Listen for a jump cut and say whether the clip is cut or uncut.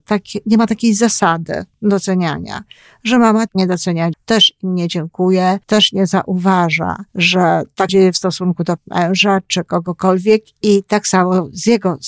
cut